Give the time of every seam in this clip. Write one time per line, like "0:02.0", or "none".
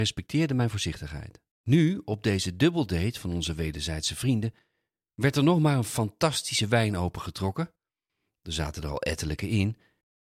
0:01.5